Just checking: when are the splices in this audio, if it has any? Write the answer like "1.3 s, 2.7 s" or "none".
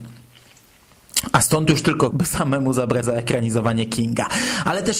2.1 s, 3.0 s